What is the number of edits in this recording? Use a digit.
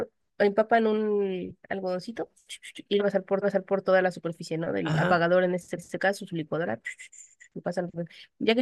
3